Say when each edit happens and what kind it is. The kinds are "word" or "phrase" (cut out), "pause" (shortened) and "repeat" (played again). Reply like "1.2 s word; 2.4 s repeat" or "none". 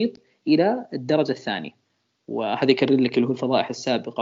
none